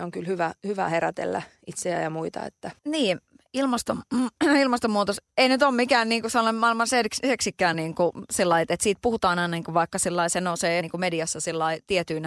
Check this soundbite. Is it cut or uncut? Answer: cut